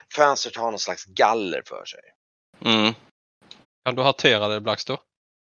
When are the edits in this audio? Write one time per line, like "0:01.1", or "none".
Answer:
0:03.6